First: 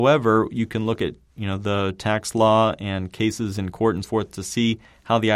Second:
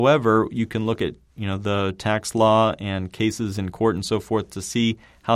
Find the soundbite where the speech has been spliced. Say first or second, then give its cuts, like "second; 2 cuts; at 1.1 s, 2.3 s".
first; 1 cut; at 4.0 s